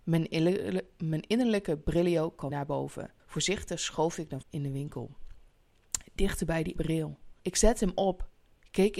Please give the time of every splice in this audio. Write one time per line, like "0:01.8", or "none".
0:02.5
0:03.2
0:04.4
0:06.8
0:07.4